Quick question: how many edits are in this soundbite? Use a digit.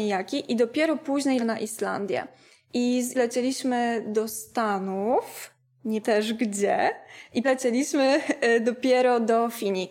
4